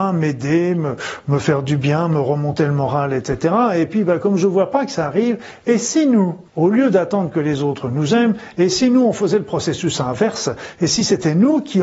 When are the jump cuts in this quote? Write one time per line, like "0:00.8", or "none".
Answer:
0:06.5